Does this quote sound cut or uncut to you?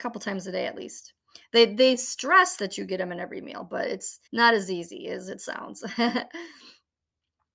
cut